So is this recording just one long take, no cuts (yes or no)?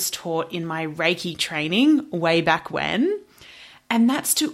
yes